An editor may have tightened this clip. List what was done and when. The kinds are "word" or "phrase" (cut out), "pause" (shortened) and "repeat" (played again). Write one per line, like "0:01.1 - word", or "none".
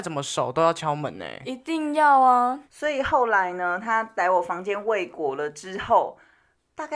0:02.7 - pause